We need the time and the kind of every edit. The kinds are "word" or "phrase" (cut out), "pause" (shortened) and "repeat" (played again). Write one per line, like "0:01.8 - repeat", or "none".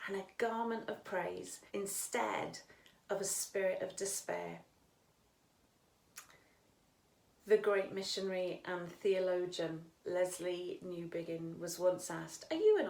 0:01.7 - pause